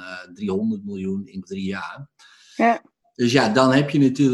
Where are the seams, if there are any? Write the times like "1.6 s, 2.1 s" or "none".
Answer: 1.4 s